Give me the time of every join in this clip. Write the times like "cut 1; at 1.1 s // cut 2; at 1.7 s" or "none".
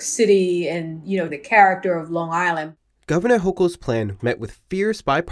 cut 1; at 1.3 s // cut 2; at 4.2 s